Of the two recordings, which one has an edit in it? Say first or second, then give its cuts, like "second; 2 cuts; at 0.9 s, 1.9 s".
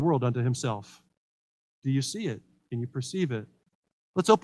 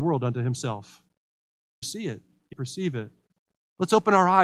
second; 2 cuts; at 1.8 s, 2.5 s